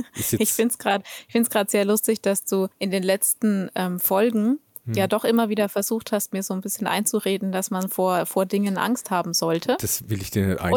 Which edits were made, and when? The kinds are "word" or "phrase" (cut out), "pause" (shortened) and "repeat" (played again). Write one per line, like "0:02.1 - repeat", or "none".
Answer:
0:02.7 - pause